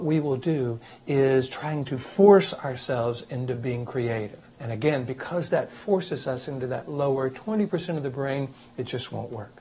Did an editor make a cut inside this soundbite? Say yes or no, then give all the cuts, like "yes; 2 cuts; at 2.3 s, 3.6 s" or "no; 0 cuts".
yes; 1 cut; at 4.5 s